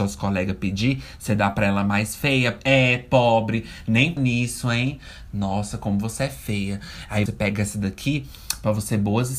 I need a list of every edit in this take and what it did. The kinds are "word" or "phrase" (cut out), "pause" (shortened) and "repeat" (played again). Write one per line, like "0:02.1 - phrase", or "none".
0:04.2 - word
0:07.3 - word